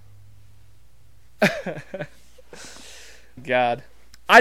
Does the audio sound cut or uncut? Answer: cut